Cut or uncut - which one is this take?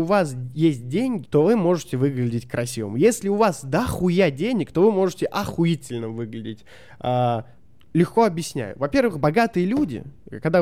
cut